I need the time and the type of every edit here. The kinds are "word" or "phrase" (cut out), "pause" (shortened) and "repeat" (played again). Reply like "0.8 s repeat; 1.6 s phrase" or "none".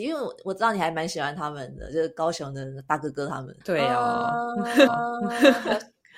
3.6 s pause; 4.9 s repeat